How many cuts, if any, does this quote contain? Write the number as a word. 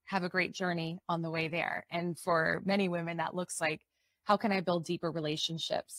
zero